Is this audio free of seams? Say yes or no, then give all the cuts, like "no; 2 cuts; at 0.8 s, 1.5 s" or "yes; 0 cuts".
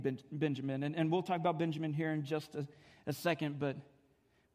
yes; 0 cuts